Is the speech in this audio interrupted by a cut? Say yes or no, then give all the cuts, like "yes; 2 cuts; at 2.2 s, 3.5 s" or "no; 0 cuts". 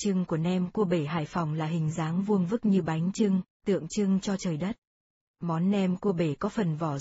yes; 1 cut; at 5.2 s